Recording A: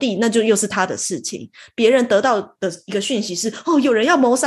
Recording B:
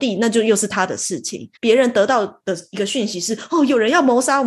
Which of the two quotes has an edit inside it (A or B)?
B